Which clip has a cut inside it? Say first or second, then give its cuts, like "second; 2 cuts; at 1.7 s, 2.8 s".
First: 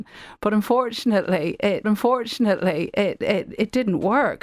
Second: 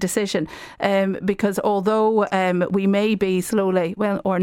first; 1 cut; at 1.8 s